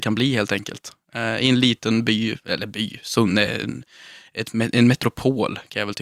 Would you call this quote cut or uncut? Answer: uncut